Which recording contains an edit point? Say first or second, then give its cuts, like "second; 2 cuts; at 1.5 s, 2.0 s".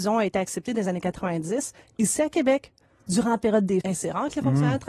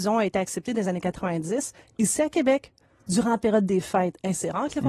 first; 1 cut; at 3.8 s